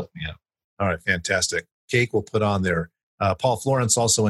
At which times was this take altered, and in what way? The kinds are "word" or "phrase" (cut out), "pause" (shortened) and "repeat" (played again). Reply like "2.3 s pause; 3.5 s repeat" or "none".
3.0 s pause